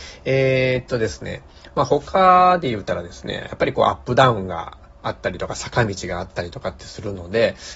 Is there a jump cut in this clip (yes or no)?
no